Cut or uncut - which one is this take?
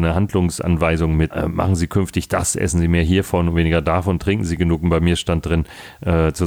cut